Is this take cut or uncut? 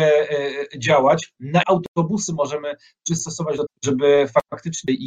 cut